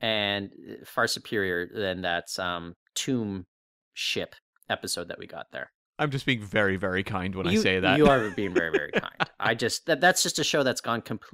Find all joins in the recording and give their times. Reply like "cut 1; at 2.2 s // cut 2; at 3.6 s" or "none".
none